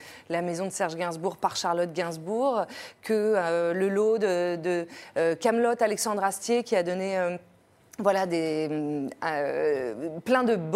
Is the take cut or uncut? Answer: uncut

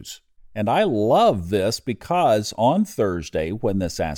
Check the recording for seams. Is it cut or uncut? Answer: uncut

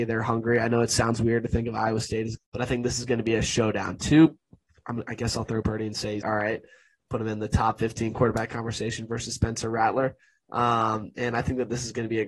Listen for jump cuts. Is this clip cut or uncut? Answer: cut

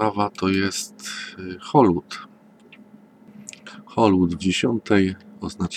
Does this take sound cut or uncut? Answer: cut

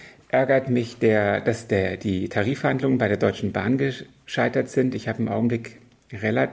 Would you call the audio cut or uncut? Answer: uncut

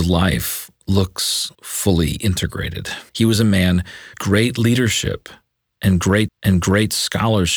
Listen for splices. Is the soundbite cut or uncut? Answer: cut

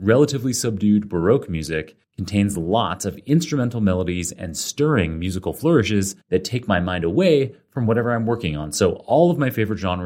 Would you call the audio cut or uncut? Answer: cut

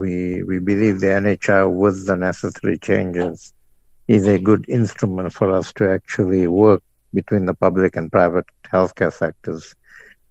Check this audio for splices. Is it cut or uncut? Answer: uncut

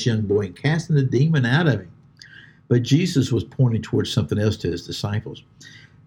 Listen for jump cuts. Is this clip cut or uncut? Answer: uncut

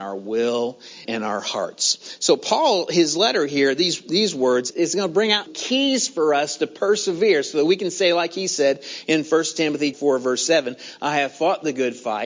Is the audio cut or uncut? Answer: cut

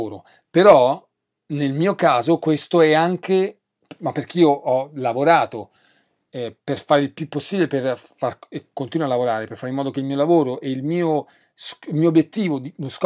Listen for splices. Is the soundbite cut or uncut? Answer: uncut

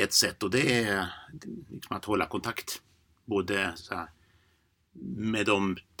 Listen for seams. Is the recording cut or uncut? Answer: uncut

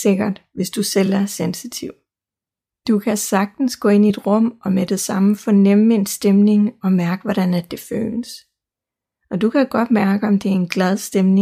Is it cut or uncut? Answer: uncut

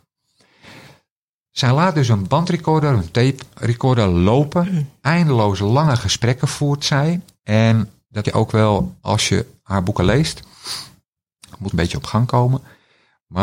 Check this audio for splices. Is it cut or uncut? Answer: cut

